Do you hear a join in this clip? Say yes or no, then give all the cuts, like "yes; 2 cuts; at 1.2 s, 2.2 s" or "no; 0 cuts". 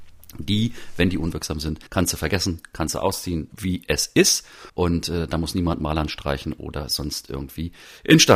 yes; 3 cuts; at 1.9 s, 3.5 s, 4.7 s